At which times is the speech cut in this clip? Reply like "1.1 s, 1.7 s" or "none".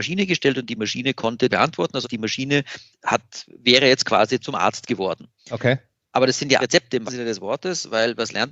1.5 s, 2.0 s, 2.9 s, 4.4 s, 5.4 s, 6.6 s, 7.1 s

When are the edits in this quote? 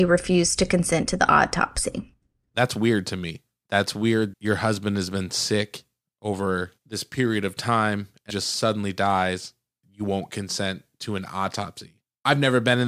4.3 s, 8.3 s, 9.8 s

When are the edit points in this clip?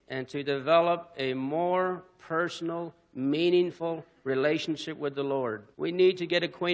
5.7 s

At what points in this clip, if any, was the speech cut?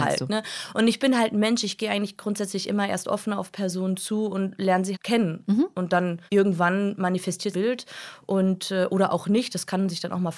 4.9 s, 6.3 s, 7.5 s

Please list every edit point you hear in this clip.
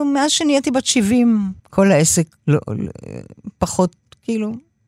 1.6 s, 2.4 s

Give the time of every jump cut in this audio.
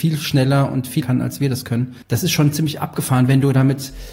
1.0 s, 2.0 s

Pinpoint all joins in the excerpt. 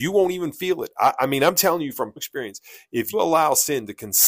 2.2 s, 3.1 s

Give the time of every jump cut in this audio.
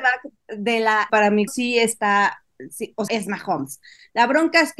1.1 s, 1.5 s, 3.1 s

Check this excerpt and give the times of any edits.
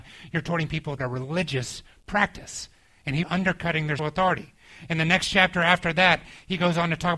1.0 s, 3.2 s, 4.0 s

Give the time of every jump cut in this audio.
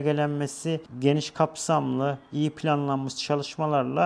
none

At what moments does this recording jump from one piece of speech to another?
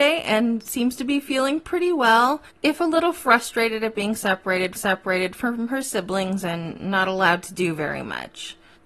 2.5 s, 4.8 s

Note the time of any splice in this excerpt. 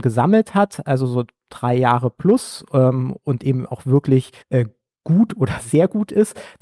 4.4 s

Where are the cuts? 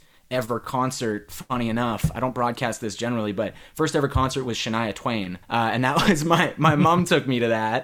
5.4 s

